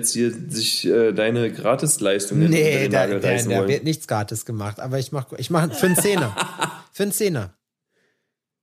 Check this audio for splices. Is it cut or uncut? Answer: uncut